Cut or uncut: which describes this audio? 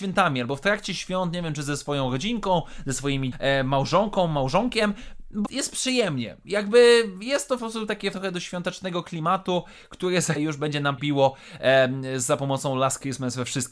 cut